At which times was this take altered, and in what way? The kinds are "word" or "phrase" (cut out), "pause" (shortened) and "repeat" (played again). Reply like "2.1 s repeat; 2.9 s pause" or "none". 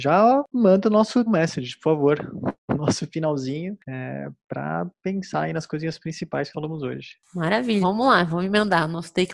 1.3 s word; 3.8 s pause; 6.5 s word; 7.8 s word